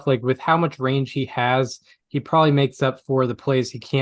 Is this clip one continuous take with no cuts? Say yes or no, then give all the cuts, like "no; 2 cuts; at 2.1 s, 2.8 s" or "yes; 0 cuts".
yes; 0 cuts